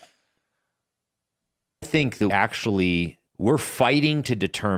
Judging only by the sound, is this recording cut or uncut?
cut